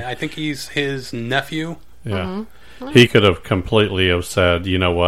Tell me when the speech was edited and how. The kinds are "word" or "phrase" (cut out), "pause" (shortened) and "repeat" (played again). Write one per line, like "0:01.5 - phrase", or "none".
0:03.1 - word